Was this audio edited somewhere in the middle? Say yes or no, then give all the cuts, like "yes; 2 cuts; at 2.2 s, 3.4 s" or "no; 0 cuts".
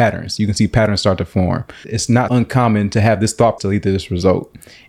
yes; 3 cuts; at 1.8 s, 2.3 s, 3.6 s